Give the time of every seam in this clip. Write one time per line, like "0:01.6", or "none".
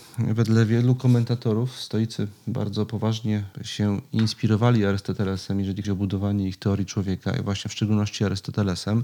0:03.5
0:05.8